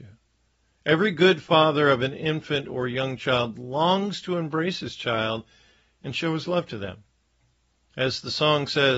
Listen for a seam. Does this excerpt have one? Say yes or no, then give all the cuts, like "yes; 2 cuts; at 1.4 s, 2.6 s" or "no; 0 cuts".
no; 0 cuts